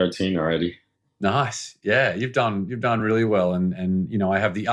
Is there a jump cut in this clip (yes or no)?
no